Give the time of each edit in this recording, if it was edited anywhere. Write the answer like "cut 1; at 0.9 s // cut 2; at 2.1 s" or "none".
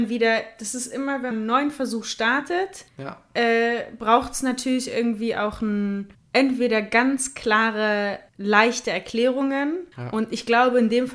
cut 1; at 1.3 s // cut 2; at 2.9 s // cut 3; at 6.1 s // cut 4; at 8.3 s // cut 5; at 9.9 s